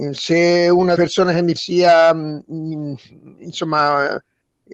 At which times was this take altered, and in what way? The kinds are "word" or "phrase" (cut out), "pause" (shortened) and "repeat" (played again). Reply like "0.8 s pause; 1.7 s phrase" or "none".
1.0 s word; 1.6 s word